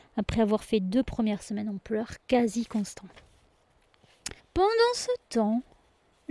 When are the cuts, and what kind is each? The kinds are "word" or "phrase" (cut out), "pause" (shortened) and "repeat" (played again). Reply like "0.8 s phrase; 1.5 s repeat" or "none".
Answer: 2.2 s pause; 4.4 s pause